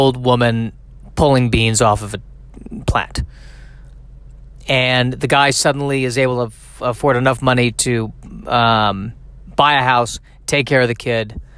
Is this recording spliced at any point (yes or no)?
no